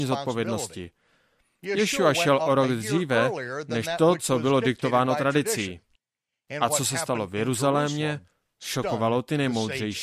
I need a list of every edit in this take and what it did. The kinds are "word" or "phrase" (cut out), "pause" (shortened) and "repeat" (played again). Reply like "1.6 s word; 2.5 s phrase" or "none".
none

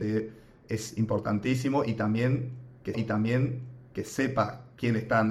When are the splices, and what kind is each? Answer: 2.9 s repeat

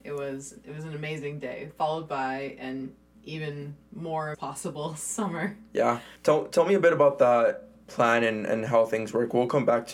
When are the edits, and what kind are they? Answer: 3.1 s pause; 4.3 s phrase; 6.2 s pause

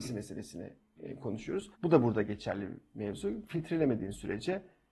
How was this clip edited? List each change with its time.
1.7 s pause

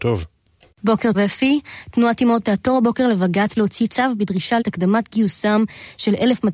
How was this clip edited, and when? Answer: 1.1 s word; 2.4 s word; 3.5 s word; 4.2 s word; 4.6 s word

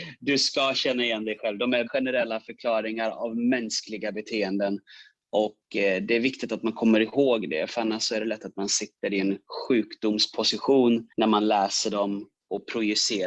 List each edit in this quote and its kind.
1.9 s word; 11.1 s pause

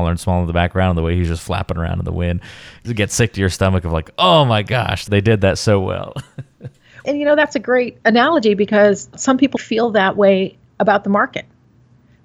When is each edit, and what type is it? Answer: 9.6 s word

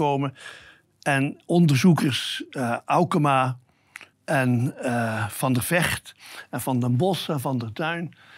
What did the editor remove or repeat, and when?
4.1 s pause

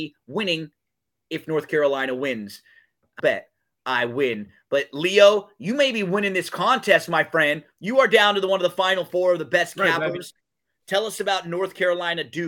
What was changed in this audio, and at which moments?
3.2 s word

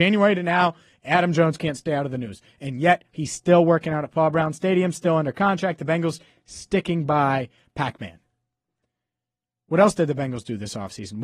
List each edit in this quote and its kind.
none

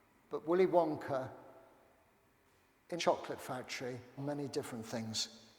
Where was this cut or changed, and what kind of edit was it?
3.0 s word; 4.2 s phrase

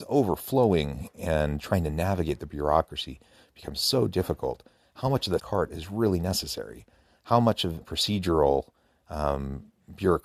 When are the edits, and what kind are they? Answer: 1.6 s word; 5.4 s phrase; 7.8 s phrase

